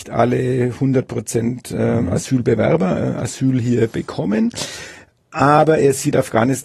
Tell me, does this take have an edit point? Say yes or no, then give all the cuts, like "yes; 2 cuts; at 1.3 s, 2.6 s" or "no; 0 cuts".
no; 0 cuts